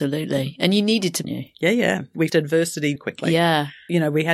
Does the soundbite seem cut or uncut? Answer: cut